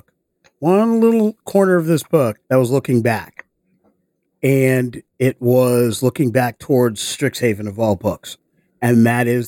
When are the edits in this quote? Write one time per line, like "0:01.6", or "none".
0:02.4